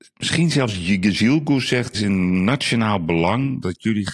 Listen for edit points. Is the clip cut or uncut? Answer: cut